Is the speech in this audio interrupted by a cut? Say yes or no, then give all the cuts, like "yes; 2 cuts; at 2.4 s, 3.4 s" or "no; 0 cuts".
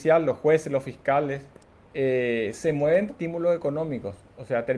yes; 2 cuts; at 1.6 s, 3.1 s